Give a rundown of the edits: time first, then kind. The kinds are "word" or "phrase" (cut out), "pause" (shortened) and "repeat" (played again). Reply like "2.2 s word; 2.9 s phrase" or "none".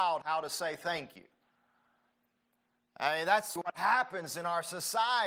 3.6 s word